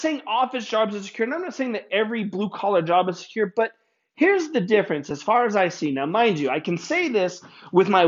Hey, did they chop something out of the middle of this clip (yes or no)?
no